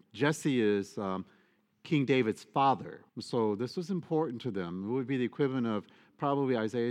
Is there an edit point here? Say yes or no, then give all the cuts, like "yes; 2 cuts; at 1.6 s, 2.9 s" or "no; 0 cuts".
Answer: yes; 1 cut; at 3.1 s